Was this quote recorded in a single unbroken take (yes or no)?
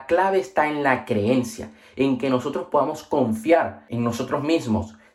yes